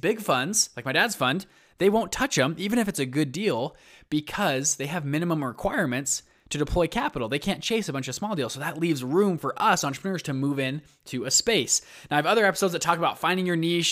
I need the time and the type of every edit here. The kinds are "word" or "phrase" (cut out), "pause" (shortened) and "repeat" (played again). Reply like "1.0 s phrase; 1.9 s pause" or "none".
none